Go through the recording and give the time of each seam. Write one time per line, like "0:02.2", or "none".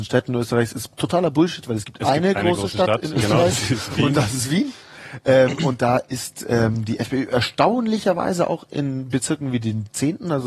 0:00.9